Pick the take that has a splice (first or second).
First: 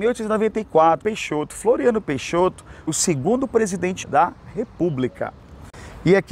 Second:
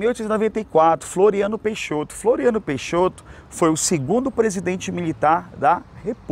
first